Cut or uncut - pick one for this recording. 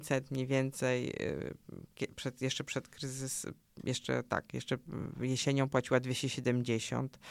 uncut